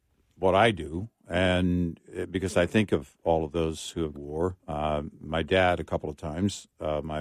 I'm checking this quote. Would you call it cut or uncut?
cut